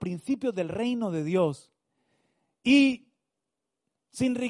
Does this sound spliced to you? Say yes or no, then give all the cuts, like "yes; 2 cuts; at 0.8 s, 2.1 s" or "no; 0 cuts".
no; 0 cuts